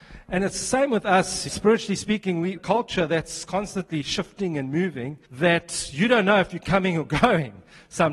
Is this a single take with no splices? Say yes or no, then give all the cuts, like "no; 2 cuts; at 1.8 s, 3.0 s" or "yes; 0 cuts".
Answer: no; 3 cuts; at 1.5 s, 2.6 s, 5.2 s